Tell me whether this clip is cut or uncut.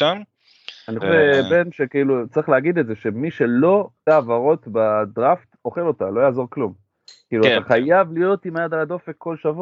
cut